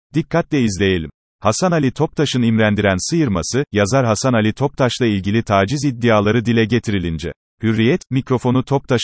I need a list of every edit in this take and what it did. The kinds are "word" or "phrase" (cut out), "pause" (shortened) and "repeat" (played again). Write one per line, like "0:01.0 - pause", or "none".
0:01.2 - pause
0:07.4 - pause